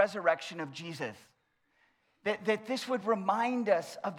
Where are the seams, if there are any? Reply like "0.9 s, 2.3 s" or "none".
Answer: none